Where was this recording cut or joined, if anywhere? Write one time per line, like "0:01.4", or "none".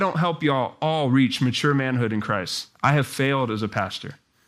none